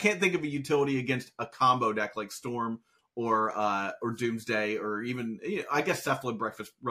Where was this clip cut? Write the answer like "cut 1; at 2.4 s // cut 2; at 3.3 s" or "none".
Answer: none